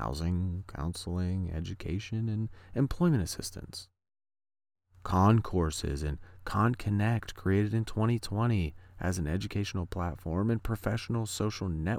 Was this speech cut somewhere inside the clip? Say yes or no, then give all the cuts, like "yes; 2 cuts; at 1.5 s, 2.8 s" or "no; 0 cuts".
no; 0 cuts